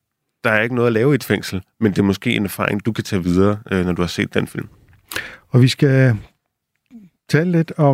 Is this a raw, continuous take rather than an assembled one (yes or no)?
yes